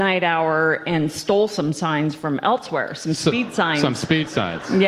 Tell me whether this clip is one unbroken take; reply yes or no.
yes